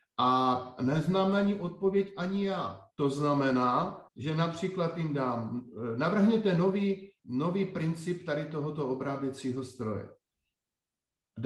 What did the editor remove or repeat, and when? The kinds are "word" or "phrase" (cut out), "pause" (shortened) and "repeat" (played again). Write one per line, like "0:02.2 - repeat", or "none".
0:02.9 - pause
0:04.1 - pause
0:07.2 - pause